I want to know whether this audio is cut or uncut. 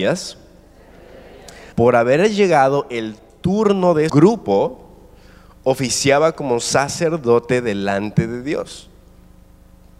cut